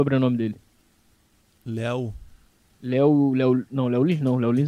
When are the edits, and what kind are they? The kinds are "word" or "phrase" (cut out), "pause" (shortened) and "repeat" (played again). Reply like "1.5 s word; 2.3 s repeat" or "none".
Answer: 2.5 s pause